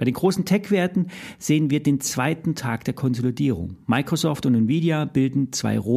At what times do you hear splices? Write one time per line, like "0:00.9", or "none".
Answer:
none